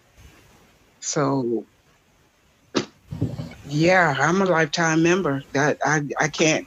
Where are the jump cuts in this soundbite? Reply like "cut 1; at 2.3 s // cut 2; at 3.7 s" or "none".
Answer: none